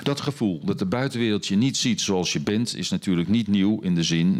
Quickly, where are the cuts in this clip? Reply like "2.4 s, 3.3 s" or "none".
none